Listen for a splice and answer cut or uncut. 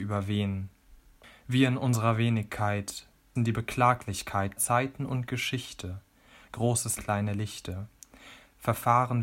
cut